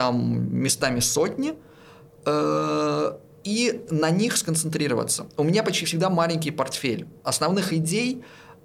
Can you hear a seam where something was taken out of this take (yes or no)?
no